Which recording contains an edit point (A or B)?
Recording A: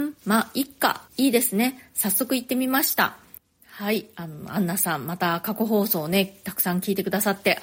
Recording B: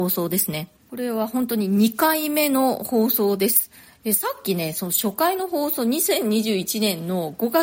A